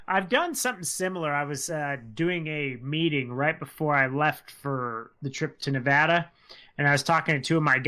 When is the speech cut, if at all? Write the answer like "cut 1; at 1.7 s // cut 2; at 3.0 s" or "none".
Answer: none